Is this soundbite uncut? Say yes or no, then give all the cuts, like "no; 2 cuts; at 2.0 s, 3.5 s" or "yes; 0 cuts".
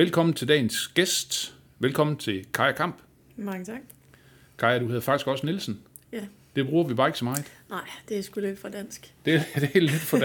yes; 0 cuts